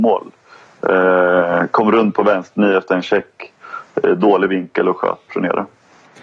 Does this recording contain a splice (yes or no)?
yes